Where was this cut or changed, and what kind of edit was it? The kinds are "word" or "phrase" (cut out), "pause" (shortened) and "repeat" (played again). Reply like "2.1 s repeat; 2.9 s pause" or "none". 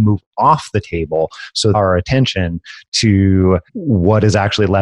1.7 s phrase; 3.7 s pause